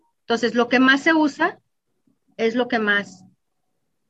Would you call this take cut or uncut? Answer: uncut